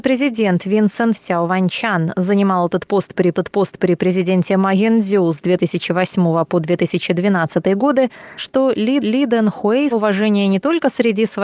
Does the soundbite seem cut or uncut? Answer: cut